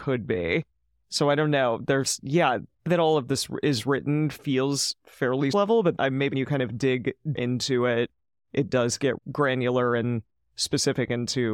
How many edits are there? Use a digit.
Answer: 6